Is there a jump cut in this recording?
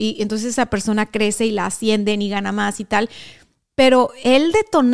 no; 0 cuts

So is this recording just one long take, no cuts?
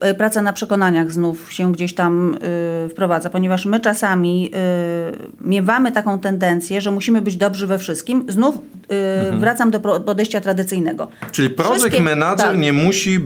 yes; 0 cuts

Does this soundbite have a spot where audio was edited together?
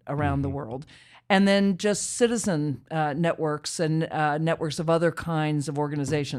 no; 0 cuts

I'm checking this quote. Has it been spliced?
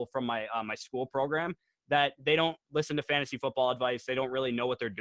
no; 0 cuts

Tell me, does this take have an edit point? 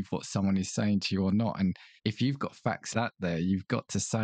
yes; 2 cuts; at 2.0 s, 2.9 s

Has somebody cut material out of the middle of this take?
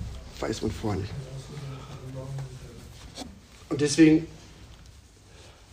no; 0 cuts

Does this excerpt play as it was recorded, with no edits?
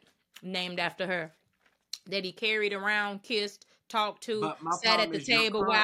yes; 0 cuts

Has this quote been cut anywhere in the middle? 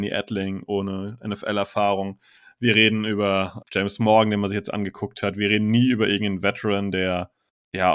yes; 1 cut; at 3.6 s

